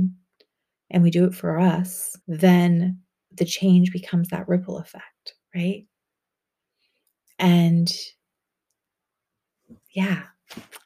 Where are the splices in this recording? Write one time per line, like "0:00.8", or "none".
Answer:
0:02.2
0:05.4